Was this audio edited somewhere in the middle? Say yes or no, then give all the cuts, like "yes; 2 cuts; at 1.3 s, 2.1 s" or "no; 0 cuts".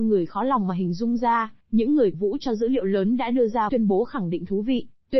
yes; 3 cuts; at 1.6 s, 2.1 s, 3.7 s